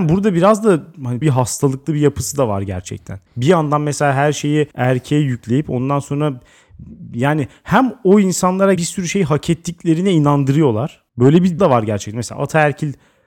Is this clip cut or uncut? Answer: cut